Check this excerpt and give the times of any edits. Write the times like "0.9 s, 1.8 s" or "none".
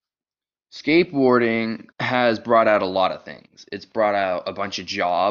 1.9 s